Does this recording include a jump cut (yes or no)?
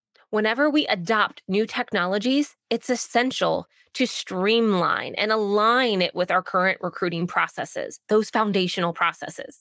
no